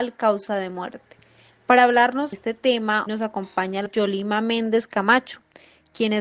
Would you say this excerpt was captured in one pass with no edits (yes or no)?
no